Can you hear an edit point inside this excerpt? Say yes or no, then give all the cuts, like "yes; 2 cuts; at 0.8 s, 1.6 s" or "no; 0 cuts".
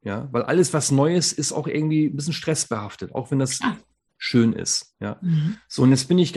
no; 0 cuts